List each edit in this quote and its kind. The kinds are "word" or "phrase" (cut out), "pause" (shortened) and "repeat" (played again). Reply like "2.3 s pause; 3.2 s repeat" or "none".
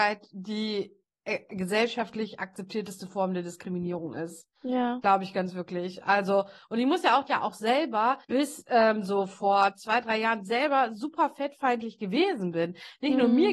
4.6 s pause; 7.3 s phrase; 8.2 s pause